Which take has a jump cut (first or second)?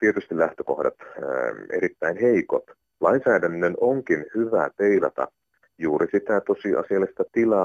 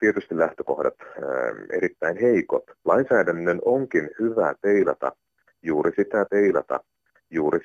second